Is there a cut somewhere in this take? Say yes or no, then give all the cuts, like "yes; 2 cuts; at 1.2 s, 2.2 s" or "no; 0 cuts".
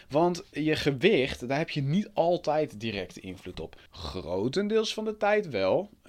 yes; 1 cut; at 3.9 s